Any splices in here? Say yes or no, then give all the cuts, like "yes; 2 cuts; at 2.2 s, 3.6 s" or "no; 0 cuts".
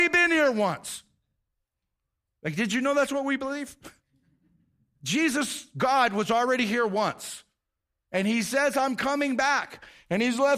no; 0 cuts